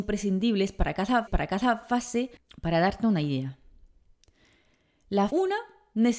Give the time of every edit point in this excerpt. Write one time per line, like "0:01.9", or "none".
0:01.3
0:05.3